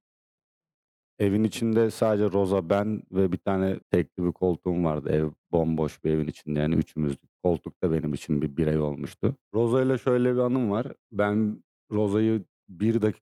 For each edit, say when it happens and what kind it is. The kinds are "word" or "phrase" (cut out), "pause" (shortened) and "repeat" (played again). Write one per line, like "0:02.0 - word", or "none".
0:03.8 - pause
0:09.4 - pause
0:11.0 - pause

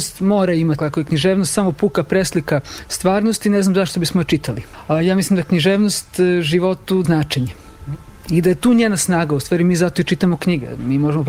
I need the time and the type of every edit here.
0:07.0 - phrase

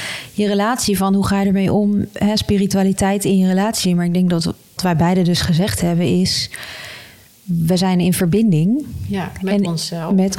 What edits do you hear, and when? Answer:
0:04.8 - word

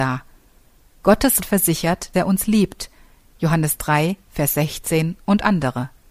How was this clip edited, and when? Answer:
0:01.4 - word
0:02.1 - word

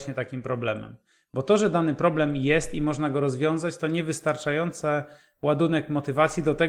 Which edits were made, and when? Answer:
none

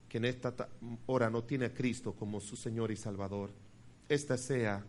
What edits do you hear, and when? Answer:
none

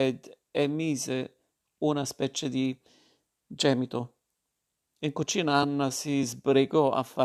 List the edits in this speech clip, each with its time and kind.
none

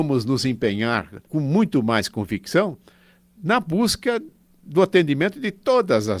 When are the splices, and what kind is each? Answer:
none

